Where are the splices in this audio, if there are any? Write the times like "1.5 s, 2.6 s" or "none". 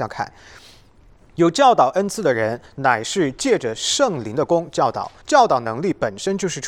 5.2 s